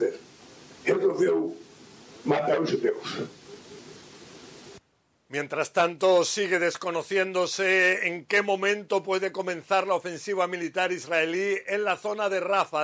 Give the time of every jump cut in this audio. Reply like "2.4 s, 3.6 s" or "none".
none